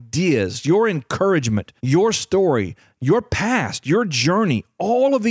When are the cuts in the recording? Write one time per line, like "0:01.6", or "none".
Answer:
0:01.8